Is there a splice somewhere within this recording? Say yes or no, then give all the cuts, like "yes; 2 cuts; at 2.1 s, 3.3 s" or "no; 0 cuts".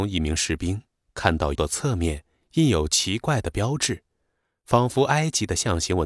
yes; 1 cut; at 1.5 s